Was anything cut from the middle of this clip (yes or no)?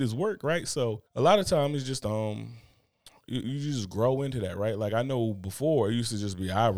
yes